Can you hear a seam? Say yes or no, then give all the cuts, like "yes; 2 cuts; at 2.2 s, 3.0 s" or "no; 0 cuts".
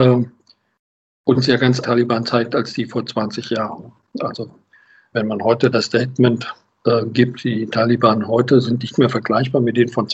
yes; 2 cuts; at 1.8 s, 5.1 s